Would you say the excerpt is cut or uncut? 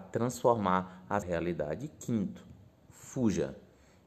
cut